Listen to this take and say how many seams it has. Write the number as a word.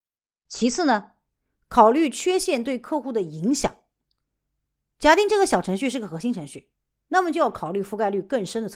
zero